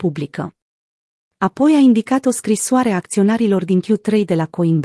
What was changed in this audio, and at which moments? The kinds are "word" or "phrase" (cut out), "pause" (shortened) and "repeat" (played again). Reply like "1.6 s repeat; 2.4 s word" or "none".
none